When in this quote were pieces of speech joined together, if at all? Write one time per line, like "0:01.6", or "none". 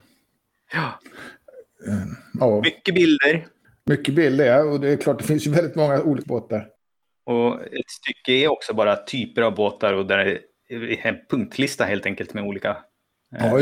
0:06.2